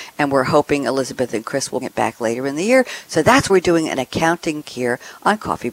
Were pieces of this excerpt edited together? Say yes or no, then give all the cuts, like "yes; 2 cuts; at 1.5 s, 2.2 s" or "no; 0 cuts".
yes; 3 cuts; at 1.8 s, 3.5 s, 4.6 s